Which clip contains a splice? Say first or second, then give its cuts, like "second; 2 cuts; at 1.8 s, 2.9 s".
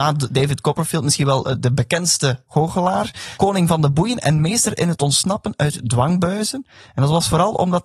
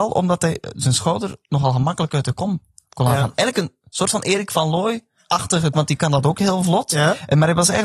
second; 1 cut; at 5.7 s